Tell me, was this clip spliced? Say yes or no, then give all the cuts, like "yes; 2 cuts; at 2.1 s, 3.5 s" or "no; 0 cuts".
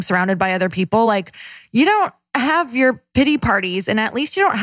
no; 0 cuts